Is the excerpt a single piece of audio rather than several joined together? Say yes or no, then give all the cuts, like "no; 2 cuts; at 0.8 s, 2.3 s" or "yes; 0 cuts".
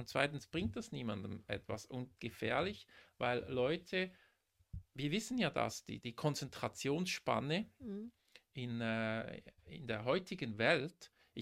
no; 2 cuts; at 2.2 s, 6.0 s